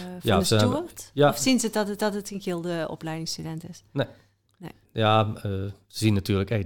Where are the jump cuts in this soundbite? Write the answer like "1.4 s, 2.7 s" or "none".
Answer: 2.0 s, 4.8 s